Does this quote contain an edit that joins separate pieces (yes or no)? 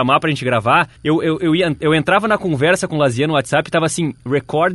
yes